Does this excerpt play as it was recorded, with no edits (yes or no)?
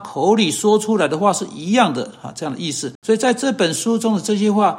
no